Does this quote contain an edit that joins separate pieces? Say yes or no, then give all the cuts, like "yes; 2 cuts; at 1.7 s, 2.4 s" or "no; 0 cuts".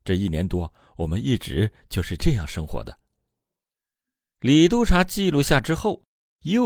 no; 0 cuts